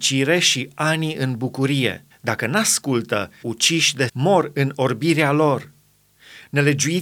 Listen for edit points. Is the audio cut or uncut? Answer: cut